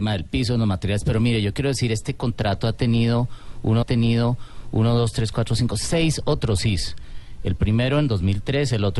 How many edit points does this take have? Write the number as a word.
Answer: one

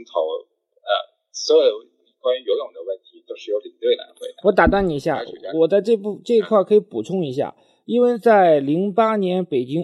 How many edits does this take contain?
zero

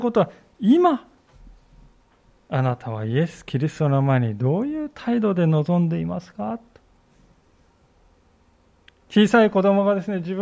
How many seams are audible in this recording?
zero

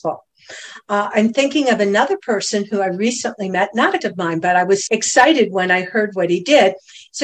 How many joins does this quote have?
two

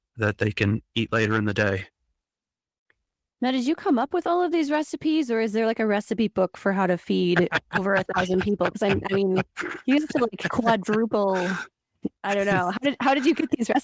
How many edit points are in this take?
one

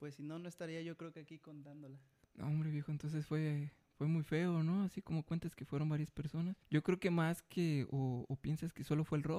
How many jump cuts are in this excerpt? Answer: two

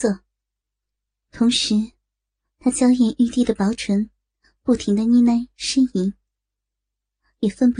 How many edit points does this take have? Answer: zero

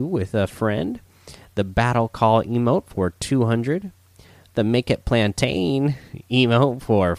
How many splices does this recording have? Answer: zero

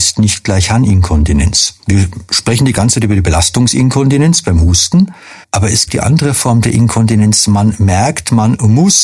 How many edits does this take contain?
three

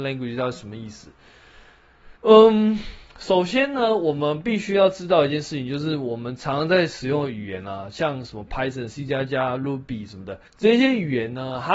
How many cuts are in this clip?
two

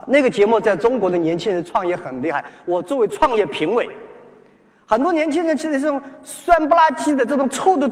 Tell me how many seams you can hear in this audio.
zero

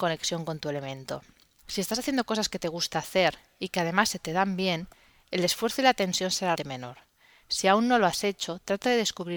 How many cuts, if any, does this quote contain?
one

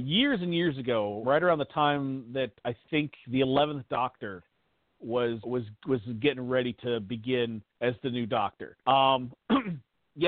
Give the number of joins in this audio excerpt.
four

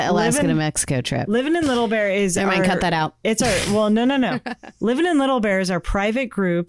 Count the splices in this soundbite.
zero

